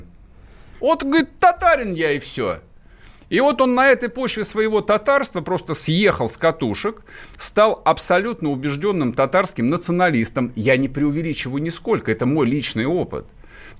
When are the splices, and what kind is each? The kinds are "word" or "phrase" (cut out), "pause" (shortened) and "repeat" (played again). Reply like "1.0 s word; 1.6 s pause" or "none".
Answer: none